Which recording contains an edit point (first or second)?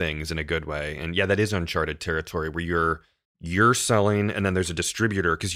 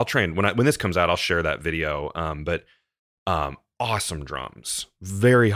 first